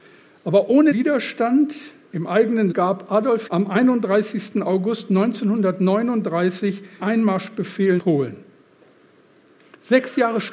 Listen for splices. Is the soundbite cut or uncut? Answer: cut